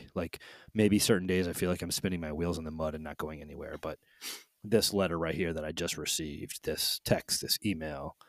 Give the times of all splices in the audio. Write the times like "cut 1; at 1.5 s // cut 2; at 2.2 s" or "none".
none